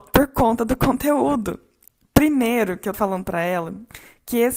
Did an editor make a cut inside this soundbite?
yes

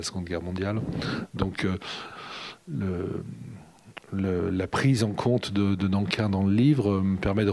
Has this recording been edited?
no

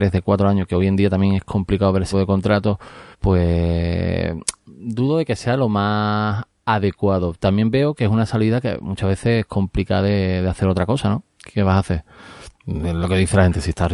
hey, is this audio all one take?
no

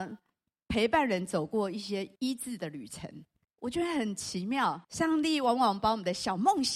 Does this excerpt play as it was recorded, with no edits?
no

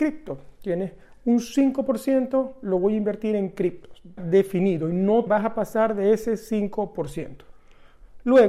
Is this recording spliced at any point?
yes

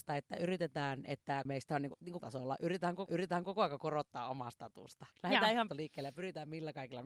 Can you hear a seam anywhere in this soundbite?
yes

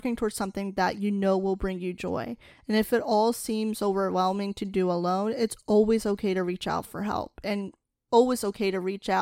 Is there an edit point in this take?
no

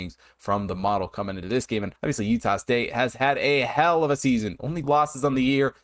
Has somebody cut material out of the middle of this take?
yes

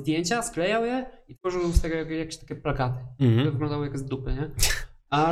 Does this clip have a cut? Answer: no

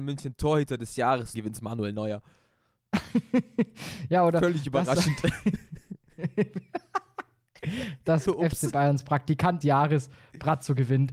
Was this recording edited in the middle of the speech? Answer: yes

